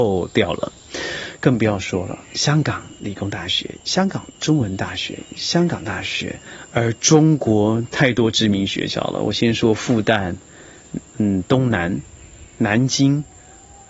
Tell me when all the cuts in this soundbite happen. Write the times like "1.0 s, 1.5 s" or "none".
2.2 s